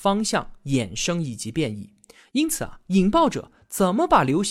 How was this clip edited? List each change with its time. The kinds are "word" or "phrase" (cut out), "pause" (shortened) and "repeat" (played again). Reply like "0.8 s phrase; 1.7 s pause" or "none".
none